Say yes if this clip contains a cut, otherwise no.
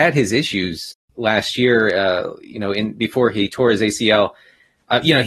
no